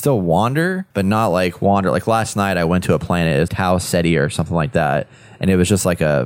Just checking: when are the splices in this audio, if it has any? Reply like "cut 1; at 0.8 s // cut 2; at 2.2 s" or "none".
cut 1; at 0.9 s // cut 2; at 3.5 s